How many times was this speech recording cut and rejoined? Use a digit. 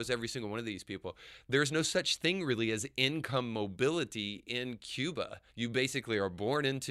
1